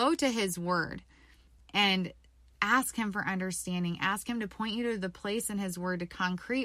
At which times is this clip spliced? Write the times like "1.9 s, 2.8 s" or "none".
none